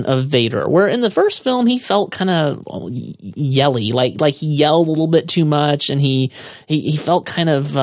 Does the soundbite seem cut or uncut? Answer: uncut